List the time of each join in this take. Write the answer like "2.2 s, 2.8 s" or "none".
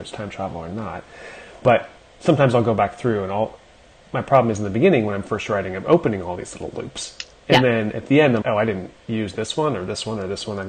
2.1 s, 8.4 s